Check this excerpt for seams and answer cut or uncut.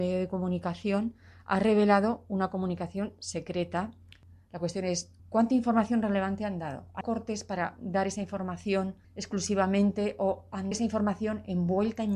cut